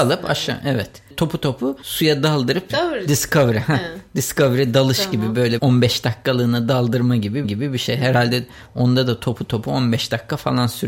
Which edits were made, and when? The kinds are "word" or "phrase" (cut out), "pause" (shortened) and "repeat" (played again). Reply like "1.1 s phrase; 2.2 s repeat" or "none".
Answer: 5.6 s word; 7.4 s repeat